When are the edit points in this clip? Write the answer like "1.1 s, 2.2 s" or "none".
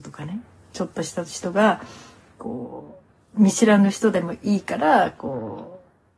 none